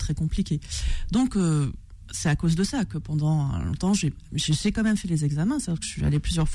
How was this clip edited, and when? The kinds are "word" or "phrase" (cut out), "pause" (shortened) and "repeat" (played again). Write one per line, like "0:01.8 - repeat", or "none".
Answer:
none